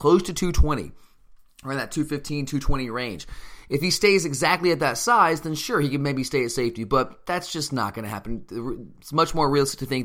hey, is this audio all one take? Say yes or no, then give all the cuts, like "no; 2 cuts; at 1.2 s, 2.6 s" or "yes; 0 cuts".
yes; 0 cuts